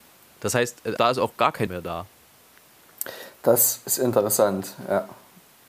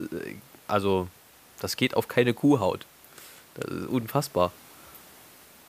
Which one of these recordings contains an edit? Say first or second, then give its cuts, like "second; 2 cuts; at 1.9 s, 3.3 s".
first; 2 cuts; at 1.0 s, 1.7 s